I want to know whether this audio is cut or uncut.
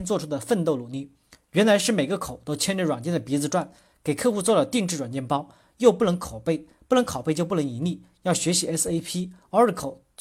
uncut